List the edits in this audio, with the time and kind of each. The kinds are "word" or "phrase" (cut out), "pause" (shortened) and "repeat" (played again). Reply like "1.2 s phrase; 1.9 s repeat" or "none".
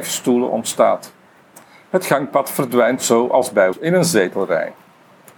3.7 s word